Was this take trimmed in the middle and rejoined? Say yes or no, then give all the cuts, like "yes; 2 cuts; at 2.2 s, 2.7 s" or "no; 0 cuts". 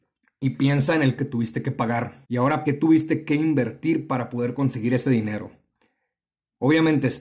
yes; 3 cuts; at 1.2 s, 2.2 s, 2.6 s